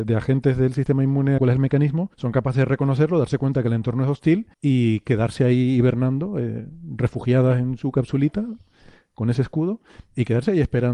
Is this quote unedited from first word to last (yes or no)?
no